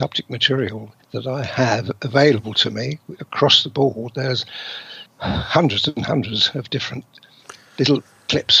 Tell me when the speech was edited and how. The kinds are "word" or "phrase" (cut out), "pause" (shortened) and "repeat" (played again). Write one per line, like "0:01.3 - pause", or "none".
0:01.0 - pause
0:05.1 - pause